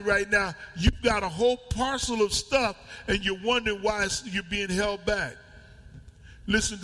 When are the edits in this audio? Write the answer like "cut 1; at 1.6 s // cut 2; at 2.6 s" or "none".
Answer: none